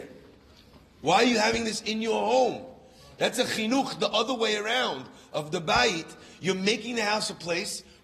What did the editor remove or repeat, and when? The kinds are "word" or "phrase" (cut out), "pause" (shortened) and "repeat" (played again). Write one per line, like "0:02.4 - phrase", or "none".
none